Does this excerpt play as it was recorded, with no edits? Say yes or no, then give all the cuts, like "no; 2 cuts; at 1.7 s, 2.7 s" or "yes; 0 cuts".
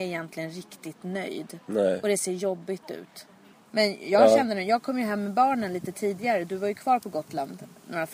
yes; 0 cuts